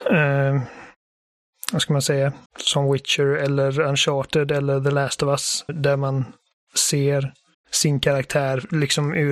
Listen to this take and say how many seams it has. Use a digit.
3